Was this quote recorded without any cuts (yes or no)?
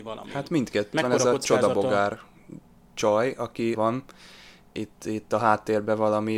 no